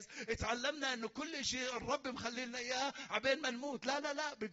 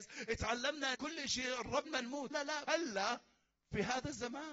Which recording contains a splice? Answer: second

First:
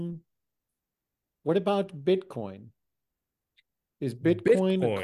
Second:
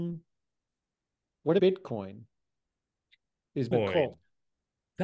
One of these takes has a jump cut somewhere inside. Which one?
second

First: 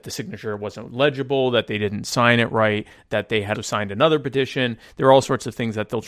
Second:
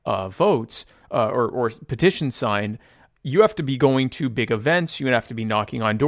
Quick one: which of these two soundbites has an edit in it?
first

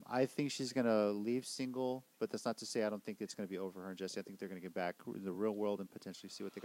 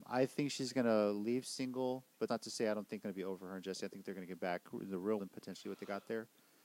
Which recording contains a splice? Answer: second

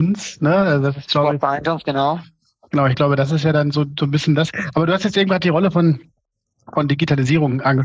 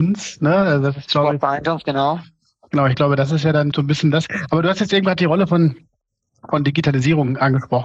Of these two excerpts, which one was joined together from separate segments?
second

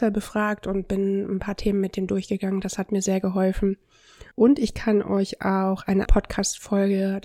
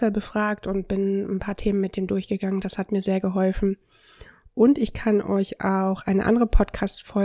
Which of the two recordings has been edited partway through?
first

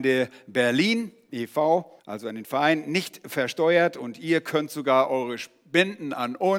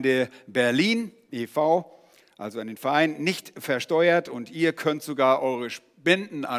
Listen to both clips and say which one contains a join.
first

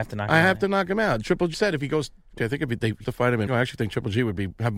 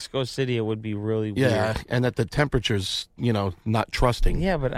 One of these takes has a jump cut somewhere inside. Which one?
first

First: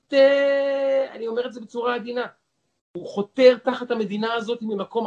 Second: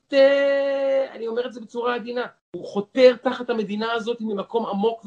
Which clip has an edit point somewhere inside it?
second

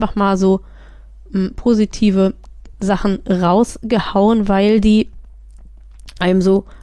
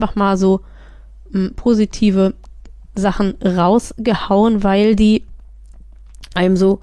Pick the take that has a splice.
first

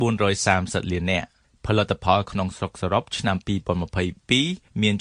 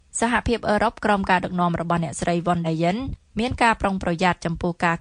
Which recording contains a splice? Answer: second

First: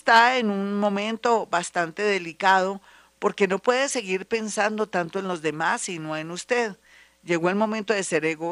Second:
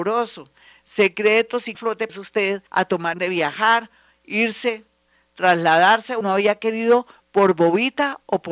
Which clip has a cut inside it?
second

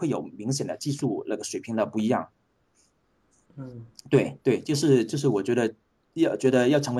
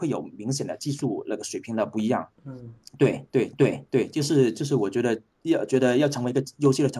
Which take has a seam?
second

